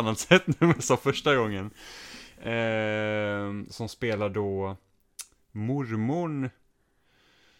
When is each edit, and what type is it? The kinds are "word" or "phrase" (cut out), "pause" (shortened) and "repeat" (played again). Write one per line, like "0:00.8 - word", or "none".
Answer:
none